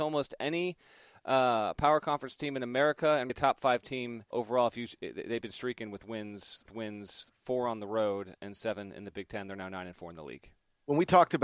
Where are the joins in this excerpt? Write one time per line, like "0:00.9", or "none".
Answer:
0:03.3
0:04.3
0:06.7